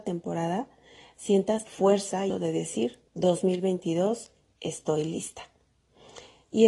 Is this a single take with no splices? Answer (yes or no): no